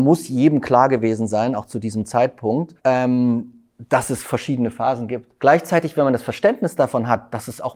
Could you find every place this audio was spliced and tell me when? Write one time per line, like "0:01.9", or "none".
0:02.8
0:05.4